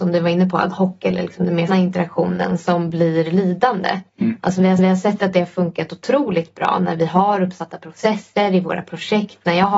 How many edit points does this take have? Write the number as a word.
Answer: three